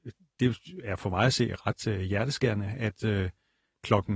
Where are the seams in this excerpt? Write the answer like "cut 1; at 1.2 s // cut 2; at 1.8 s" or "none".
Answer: none